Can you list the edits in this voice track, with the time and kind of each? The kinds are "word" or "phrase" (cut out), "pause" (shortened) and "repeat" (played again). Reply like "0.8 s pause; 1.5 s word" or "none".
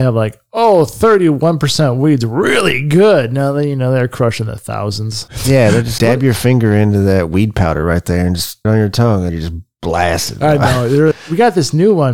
6.0 s word; 8.6 s word; 9.3 s word; 11.1 s word